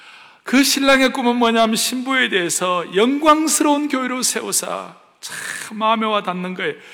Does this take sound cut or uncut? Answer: uncut